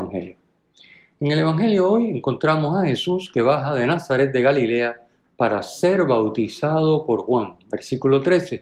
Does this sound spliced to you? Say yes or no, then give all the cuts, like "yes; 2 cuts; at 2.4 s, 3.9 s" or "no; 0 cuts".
no; 0 cuts